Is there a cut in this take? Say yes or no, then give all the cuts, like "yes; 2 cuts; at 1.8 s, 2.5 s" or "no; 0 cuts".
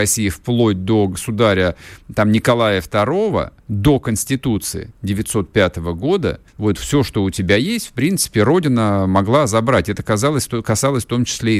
yes; 2 cuts; at 3.6 s, 6.5 s